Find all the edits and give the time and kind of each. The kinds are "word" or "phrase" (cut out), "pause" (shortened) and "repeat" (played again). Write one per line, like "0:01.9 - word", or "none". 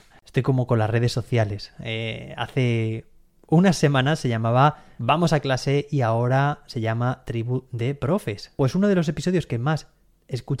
none